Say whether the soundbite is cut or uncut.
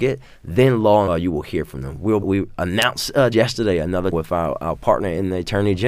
cut